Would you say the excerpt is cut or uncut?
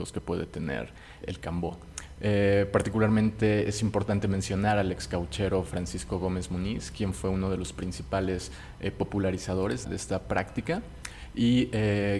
cut